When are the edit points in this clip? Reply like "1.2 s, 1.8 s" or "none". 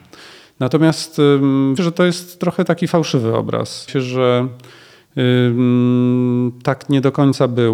1.8 s, 3.9 s